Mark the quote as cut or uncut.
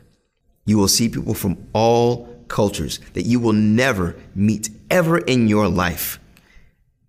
uncut